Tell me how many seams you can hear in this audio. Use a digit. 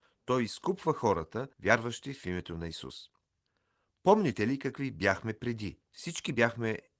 2